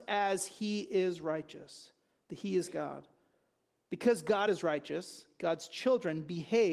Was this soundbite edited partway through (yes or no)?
no